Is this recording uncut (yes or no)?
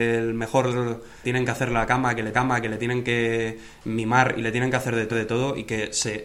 no